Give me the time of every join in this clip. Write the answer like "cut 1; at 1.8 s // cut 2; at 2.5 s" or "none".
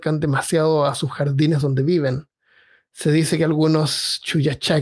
none

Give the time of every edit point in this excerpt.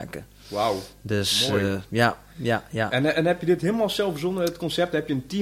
none

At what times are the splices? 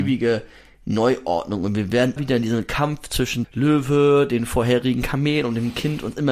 cut 1; at 2.2 s // cut 2; at 3.4 s

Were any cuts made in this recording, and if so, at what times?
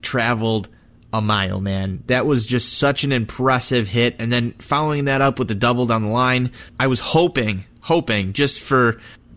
cut 1; at 6.7 s

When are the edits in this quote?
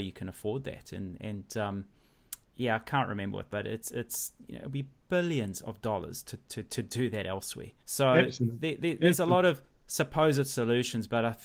cut 1; at 2.4 s // cut 2; at 3.5 s // cut 3; at 7.8 s

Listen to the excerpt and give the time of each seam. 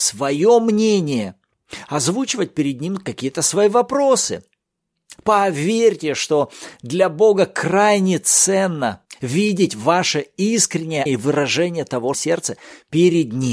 cut 1; at 11.1 s // cut 2; at 12.1 s

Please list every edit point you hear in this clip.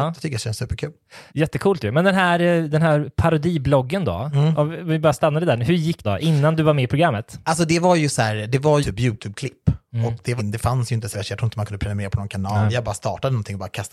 cut 1; at 1.3 s // cut 2; at 6.0 s // cut 3; at 8.8 s // cut 4; at 10.4 s // cut 5; at 11.1 s

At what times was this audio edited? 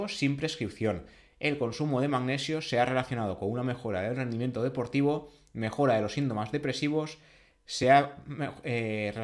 none

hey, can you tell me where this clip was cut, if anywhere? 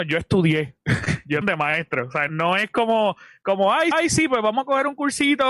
cut 1; at 1.4 s // cut 2; at 2.3 s // cut 3; at 3.9 s

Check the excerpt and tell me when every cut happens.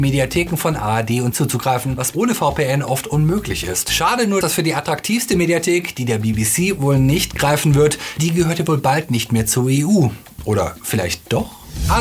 cut 1; at 1.3 s // cut 2; at 2.1 s // cut 3; at 4.4 s // cut 4; at 8.2 s

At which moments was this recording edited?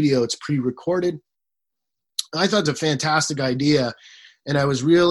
cut 1; at 2.7 s

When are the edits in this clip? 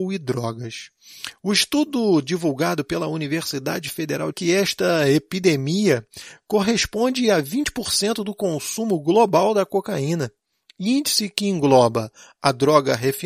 cut 1; at 4.3 s

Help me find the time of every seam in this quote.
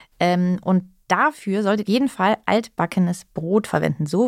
cut 1; at 1.9 s

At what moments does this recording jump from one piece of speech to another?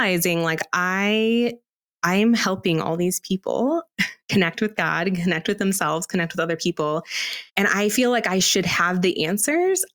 cut 1; at 4.2 s // cut 2; at 7.5 s

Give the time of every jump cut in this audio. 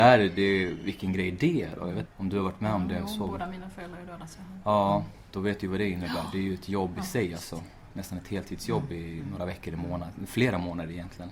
cut 1; at 2.0 s

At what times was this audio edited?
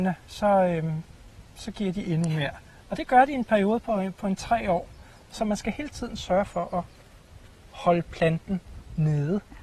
none

